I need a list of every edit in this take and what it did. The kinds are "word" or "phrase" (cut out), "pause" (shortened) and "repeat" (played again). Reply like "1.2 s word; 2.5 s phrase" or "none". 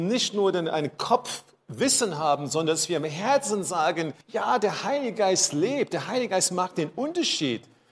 4.2 s pause